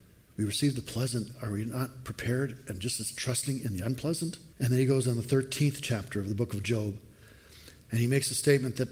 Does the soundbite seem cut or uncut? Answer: cut